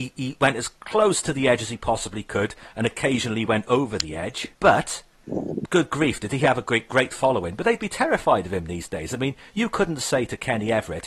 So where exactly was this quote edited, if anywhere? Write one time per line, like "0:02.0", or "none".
0:04.5